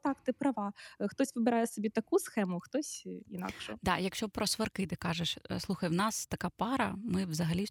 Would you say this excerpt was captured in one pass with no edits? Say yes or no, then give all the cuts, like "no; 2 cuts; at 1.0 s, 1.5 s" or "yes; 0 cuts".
yes; 0 cuts